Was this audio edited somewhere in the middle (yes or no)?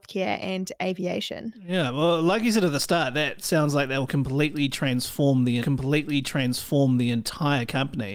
yes